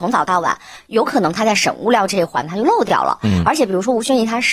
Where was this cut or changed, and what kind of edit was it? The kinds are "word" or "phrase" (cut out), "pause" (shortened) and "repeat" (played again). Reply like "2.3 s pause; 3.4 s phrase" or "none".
none